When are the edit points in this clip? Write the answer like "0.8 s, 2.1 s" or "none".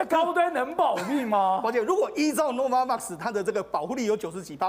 none